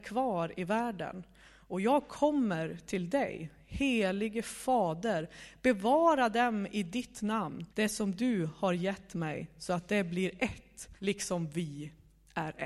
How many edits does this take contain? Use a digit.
2